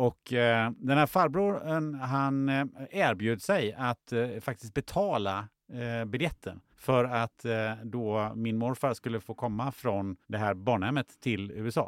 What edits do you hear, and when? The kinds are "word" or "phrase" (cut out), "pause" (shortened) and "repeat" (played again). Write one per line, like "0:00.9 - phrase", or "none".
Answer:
0:06.7 - pause
0:10.2 - pause